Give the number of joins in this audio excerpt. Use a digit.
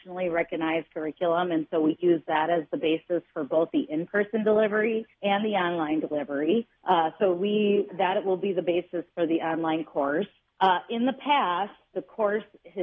4